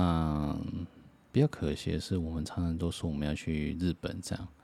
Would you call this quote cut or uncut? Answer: uncut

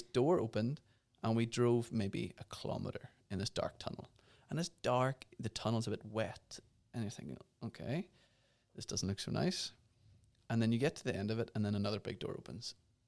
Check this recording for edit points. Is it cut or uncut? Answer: uncut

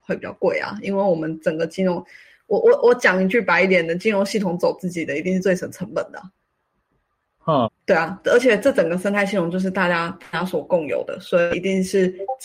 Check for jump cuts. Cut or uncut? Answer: cut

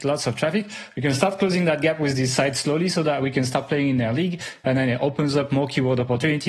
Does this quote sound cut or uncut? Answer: uncut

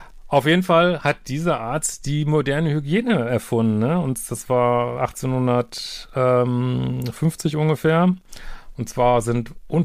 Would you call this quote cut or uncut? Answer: uncut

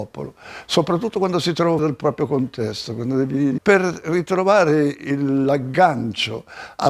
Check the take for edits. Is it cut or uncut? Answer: cut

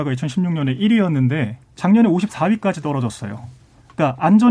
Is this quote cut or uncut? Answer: cut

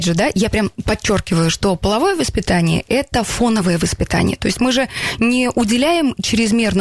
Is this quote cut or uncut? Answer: uncut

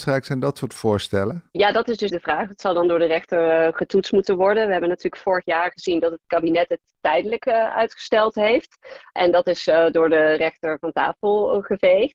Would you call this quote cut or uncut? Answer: cut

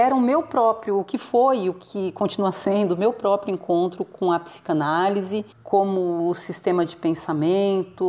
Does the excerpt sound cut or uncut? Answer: cut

